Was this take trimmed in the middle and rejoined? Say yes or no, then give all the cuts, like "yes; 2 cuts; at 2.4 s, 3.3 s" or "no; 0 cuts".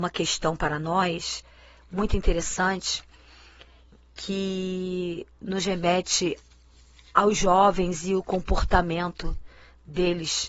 no; 0 cuts